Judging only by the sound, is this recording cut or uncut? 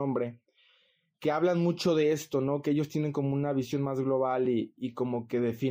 uncut